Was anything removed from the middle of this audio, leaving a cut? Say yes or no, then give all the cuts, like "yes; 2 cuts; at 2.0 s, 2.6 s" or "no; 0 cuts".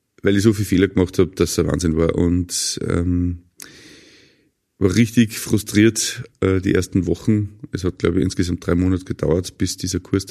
no; 0 cuts